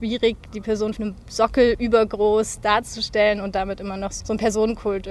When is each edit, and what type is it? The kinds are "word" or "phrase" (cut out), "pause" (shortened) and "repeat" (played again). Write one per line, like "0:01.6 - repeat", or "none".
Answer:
0:01.0 - phrase
0:04.2 - word